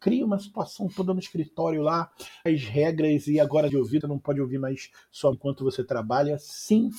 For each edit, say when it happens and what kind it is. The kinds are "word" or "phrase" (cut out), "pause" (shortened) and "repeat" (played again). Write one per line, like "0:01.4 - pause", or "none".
0:02.5 - phrase
0:03.7 - phrase
0:04.0 - word
0:05.3 - word